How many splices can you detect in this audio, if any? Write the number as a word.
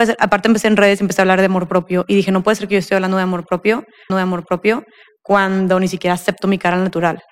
one